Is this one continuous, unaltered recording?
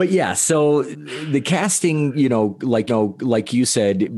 no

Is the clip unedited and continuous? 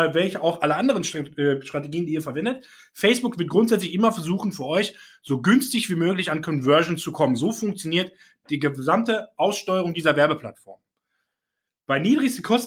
yes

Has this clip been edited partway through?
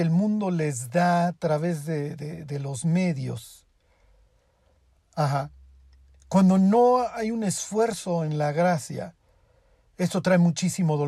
no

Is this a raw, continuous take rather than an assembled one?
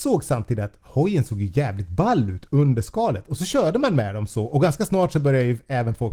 yes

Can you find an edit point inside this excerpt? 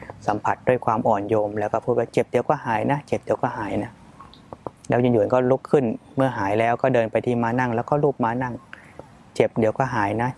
no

